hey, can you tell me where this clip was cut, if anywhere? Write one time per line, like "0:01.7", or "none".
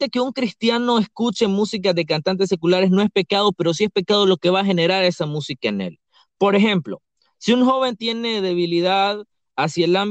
none